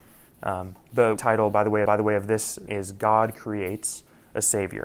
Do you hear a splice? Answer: yes; 3 cuts; at 1.2 s, 1.9 s, 2.7 s

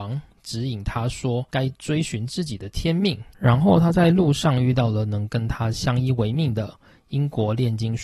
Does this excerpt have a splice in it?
yes; 1 cut; at 1.5 s

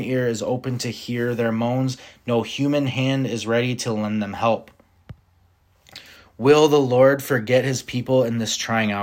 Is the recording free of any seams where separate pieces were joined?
yes; 0 cuts

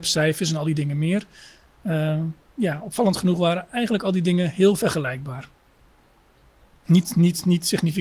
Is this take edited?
no; 0 cuts

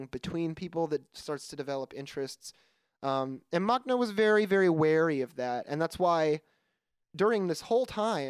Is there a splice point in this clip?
no; 0 cuts

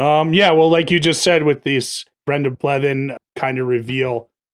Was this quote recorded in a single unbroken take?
no; 1 cut; at 2.1 s

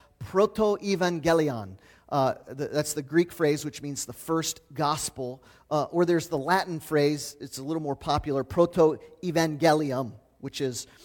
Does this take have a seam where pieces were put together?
no; 0 cuts

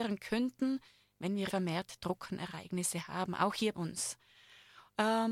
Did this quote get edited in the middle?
yes; 2 cuts; at 1.5 s, 3.7 s

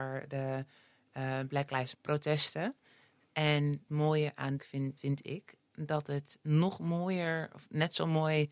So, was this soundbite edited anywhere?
yes; 4 cuts; at 1.9 s, 3.9 s, 4.6 s, 5.0 s

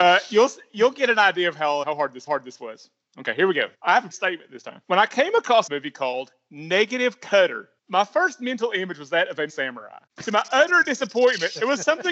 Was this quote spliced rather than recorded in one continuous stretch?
yes; 9 cuts; at 1.8 s, 2.3 s, 3.7 s, 4.1 s, 4.8 s, 5.7 s, 7.8 s, 9.5 s, 10.1 s

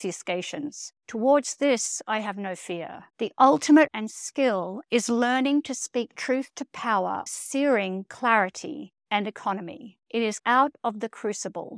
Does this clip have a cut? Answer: yes; 7 cuts; at 1.0 s, 3.1 s, 3.9 s, 7.3 s, 9.0 s, 10.0 s, 10.4 s

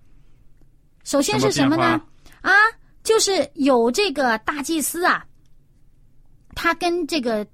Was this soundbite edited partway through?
no; 0 cuts

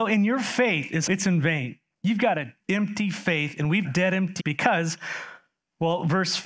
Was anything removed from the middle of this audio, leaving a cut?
yes; 5 cuts; at 1.1 s, 1.9 s, 2.6 s, 3.8 s, 4.4 s

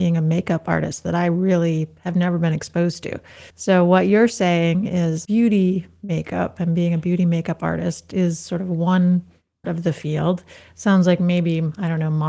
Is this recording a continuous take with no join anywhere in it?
no; 3 cuts; at 3.5 s, 5.3 s, 9.6 s

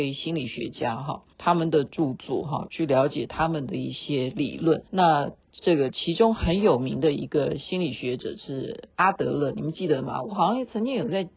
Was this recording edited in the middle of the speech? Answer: yes; 3 cuts; at 1.3 s, 4.9 s, 8.9 s

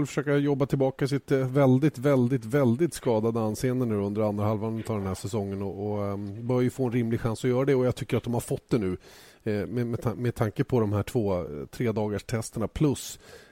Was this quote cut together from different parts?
no; 0 cuts

